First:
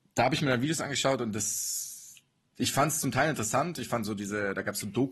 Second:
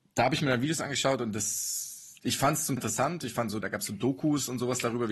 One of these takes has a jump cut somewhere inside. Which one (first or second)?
second